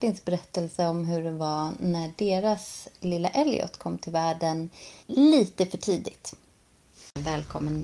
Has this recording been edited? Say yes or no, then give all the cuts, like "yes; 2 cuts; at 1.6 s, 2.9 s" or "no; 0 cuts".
yes; 1 cut; at 5.0 s